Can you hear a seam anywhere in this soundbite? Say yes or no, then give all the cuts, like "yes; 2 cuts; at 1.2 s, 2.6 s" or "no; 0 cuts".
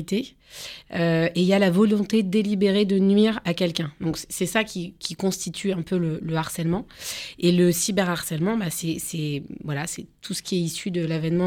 no; 0 cuts